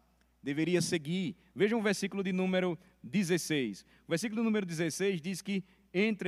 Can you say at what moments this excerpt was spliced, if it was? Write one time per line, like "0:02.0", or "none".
none